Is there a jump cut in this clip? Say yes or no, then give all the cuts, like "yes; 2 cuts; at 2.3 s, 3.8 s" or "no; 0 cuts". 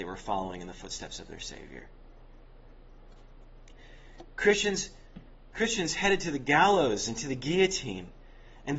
no; 0 cuts